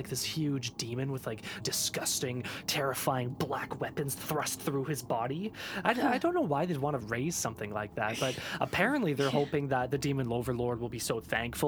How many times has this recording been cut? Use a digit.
2